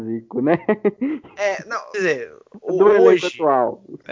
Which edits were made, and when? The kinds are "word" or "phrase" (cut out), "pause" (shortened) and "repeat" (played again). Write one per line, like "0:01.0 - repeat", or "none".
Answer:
0:01.9 - word